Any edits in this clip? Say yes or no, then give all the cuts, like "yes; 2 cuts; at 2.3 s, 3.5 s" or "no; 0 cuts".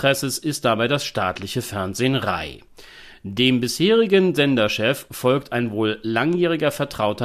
no; 0 cuts